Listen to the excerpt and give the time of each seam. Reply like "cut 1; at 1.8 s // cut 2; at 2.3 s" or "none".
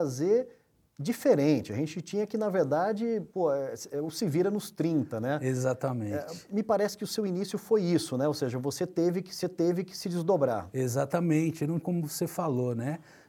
cut 1; at 3.3 s // cut 2; at 9.4 s // cut 3; at 11.8 s

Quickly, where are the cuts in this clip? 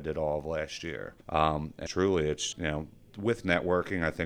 cut 1; at 1.2 s // cut 2; at 1.9 s // cut 3; at 2.5 s

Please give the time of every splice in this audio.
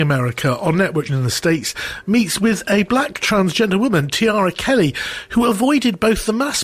cut 1; at 1.1 s

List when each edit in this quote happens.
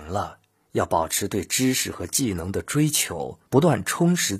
cut 1; at 3.5 s

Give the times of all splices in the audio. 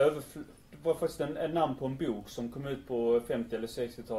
none

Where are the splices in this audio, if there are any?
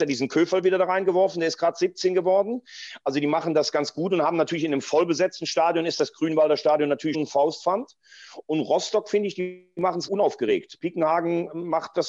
cut 1; at 7.1 s // cut 2; at 10.1 s

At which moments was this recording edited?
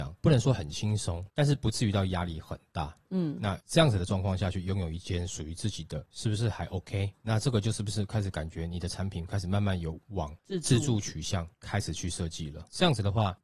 cut 1; at 6.1 s

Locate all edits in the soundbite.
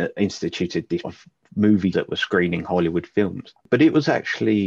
cut 1; at 1.0 s // cut 2; at 1.9 s

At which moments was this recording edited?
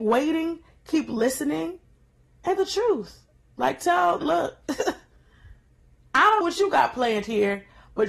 cut 1; at 2.6 s // cut 2; at 4.2 s // cut 3; at 6.4 s

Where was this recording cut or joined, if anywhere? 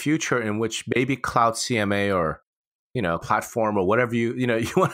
cut 1; at 3.2 s

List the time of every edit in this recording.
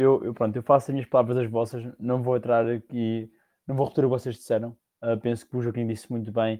none

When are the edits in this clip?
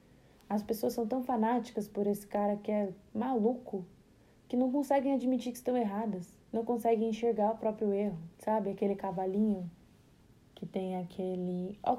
cut 1; at 6.4 s // cut 2; at 8.3 s

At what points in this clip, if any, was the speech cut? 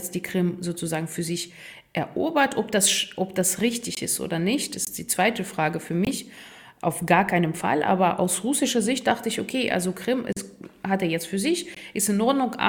none

